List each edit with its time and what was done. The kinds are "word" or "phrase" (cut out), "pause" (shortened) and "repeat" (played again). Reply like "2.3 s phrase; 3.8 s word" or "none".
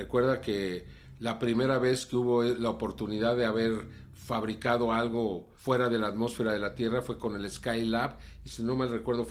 5.6 s pause